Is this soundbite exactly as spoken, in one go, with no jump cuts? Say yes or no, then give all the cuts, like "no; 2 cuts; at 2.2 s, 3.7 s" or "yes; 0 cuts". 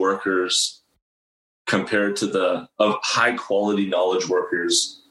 yes; 0 cuts